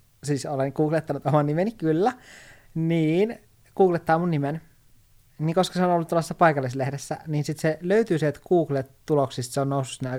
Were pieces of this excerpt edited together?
no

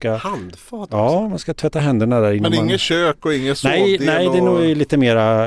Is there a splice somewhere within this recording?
no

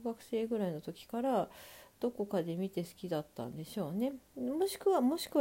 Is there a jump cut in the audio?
yes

